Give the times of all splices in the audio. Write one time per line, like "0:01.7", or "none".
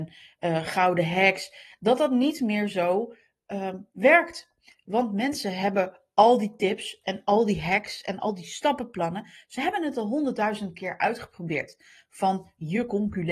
none